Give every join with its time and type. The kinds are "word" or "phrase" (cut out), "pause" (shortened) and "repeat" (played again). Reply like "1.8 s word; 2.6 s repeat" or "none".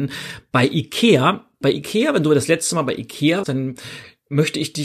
1.6 s word; 3.4 s word

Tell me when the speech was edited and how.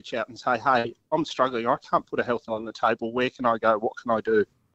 2.5 s word

